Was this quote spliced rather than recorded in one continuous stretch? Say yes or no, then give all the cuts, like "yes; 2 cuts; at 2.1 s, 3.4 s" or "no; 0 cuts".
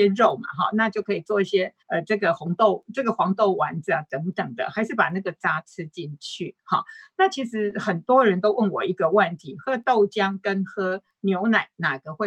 yes; 1 cut; at 1.8 s